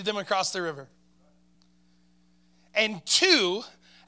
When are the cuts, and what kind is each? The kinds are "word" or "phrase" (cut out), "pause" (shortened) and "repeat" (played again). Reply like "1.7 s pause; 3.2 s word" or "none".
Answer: none